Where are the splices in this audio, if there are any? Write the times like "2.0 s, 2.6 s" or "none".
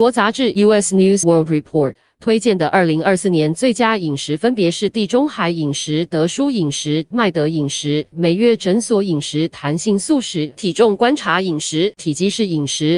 1.2 s